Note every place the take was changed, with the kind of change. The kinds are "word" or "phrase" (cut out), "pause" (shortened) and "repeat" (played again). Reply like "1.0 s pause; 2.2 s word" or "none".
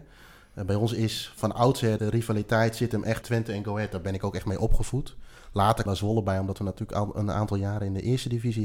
2.0 s word; 3.2 s word; 5.9 s word